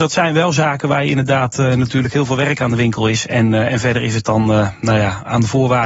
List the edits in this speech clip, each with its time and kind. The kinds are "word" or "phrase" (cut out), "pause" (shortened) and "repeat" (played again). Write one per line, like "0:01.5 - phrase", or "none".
none